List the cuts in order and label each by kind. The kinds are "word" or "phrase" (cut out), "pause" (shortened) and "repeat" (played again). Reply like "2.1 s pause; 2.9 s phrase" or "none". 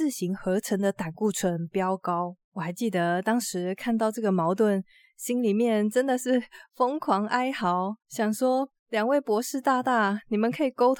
2.4 s pause; 8.0 s pause; 8.8 s pause